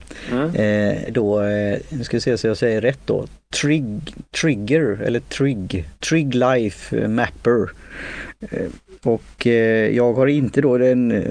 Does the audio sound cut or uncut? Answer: cut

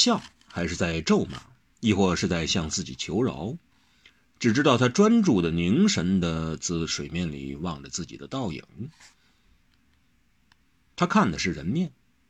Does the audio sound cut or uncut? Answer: uncut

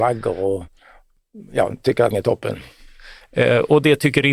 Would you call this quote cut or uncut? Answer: cut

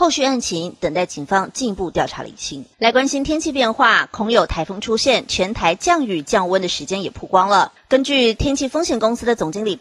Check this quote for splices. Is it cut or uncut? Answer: cut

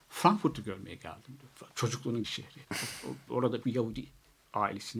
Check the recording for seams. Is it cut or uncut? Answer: cut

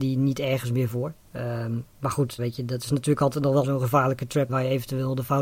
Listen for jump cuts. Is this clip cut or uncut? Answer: cut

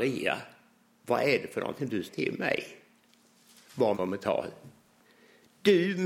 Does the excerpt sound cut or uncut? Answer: cut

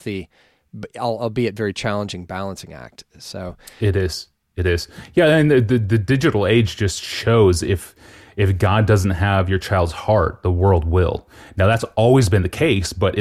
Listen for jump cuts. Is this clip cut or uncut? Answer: uncut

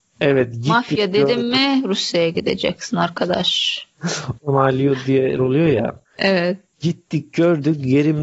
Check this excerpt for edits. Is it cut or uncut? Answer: cut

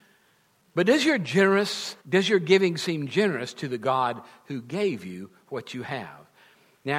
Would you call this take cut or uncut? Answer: cut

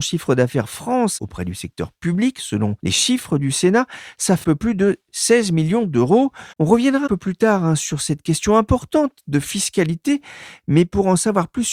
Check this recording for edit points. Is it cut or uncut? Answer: cut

